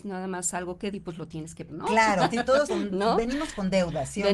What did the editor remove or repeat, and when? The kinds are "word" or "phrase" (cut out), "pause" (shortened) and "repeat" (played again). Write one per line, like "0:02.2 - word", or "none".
0:00.9 - word
0:01.7 - word
0:02.3 - word
0:02.7 - word